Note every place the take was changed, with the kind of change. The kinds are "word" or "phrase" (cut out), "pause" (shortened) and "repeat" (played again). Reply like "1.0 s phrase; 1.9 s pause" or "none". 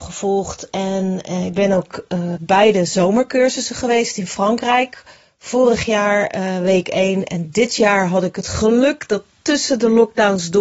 2.4 s word